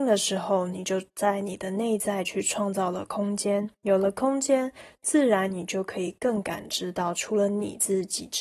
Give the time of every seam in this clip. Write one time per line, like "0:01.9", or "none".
0:03.7